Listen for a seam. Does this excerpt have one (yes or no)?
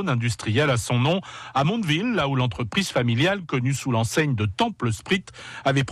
no